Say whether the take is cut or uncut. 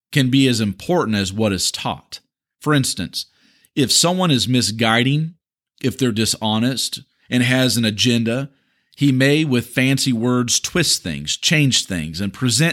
uncut